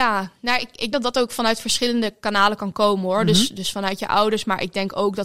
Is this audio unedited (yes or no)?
no